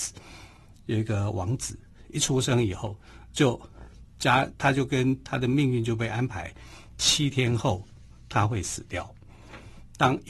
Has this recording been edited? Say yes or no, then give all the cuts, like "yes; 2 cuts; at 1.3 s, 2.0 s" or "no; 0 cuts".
no; 0 cuts